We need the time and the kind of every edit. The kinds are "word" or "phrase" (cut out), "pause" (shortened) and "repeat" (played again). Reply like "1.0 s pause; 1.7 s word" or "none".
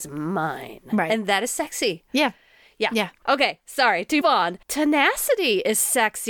4.2 s word; 4.6 s pause